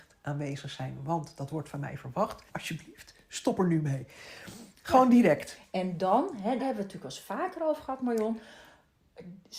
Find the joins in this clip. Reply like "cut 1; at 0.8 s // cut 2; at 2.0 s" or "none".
cut 1; at 2.5 s // cut 2; at 4.7 s // cut 3; at 6.6 s